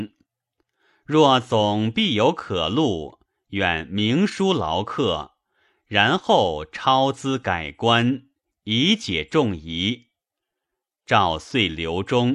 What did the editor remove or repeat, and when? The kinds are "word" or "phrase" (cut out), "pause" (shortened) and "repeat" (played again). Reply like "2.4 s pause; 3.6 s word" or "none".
none